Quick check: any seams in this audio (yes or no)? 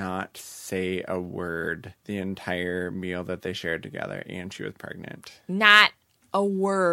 yes